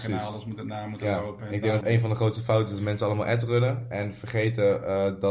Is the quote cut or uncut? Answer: cut